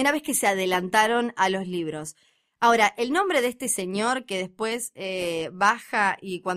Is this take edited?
no; 0 cuts

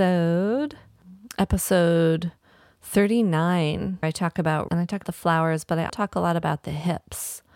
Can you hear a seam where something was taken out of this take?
yes; 4 cuts; at 4.0 s, 4.7 s, 5.0 s, 5.9 s

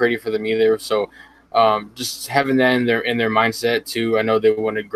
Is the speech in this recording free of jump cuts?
yes; 0 cuts

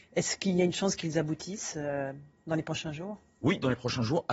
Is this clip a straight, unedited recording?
yes; 0 cuts

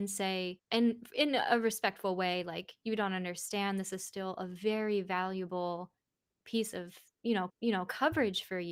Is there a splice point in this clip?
yes; 1 cut; at 7.5 s

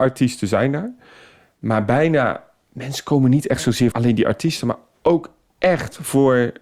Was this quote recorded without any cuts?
no; 1 cut; at 3.9 s

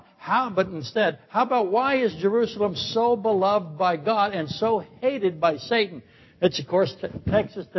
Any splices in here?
no; 0 cuts

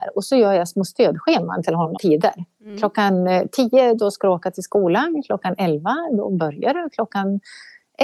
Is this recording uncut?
no; 1 cut; at 2.0 s

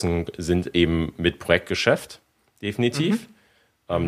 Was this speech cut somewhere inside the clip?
no; 0 cuts

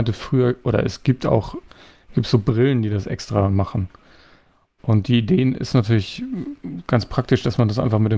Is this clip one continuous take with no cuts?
yes; 0 cuts

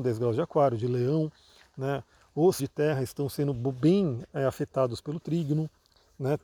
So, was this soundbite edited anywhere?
yes; 1 cut; at 2.6 s

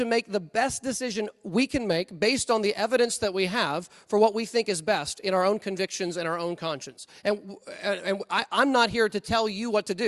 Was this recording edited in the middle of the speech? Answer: no; 0 cuts

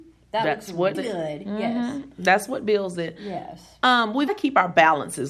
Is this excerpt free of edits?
no; 2 cuts; at 0.9 s, 4.3 s

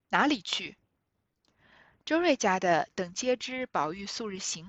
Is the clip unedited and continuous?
yes; 0 cuts

